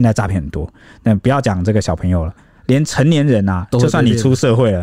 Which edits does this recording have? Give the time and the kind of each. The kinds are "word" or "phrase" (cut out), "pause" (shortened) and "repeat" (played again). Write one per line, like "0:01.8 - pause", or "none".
none